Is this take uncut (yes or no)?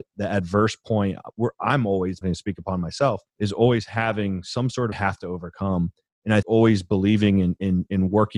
no